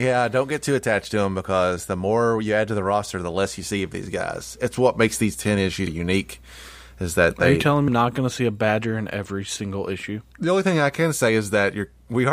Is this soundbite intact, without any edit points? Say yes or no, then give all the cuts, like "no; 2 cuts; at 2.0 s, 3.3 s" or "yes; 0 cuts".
no; 2 cuts; at 5.9 s, 7.9 s